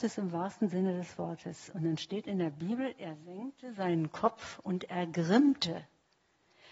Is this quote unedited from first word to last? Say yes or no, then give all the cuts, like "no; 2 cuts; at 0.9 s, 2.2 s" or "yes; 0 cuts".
yes; 0 cuts